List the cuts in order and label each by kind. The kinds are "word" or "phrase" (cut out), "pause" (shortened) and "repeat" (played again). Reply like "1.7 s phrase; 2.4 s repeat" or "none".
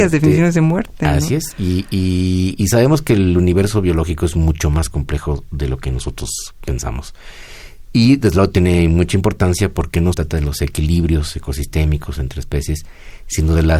10.1 s phrase